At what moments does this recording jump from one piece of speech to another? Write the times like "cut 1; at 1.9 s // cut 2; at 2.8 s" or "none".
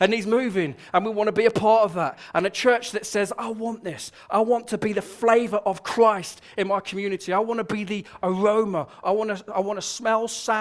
none

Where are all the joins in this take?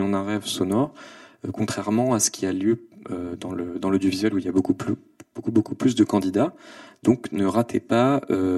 none

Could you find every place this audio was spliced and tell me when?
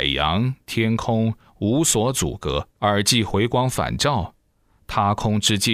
cut 1; at 2.7 s

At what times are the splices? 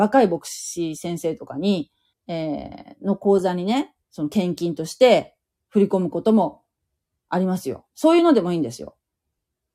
cut 1; at 2.1 s // cut 2; at 4.0 s

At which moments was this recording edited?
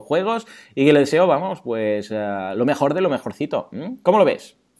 none

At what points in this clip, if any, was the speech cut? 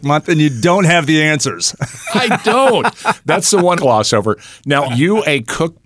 cut 1; at 3.8 s // cut 2; at 4.9 s

